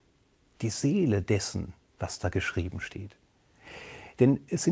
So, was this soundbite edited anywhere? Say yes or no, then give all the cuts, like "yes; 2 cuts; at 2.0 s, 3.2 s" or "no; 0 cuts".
no; 0 cuts